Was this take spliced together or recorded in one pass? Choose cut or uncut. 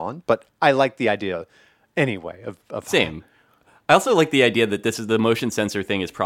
uncut